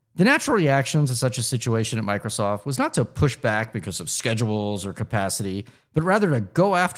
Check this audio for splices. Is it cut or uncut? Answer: uncut